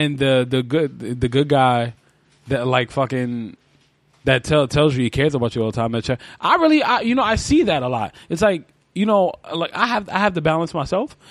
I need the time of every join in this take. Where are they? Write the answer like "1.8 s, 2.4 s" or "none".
none